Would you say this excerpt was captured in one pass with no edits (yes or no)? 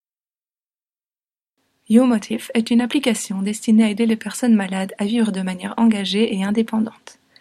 yes